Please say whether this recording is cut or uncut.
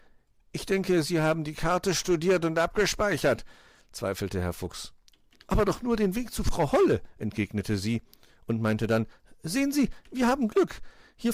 uncut